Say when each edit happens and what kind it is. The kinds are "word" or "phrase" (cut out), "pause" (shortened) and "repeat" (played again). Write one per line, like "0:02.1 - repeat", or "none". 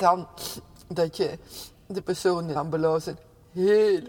0:02.6 - word